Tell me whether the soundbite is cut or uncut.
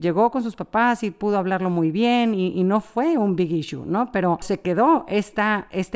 uncut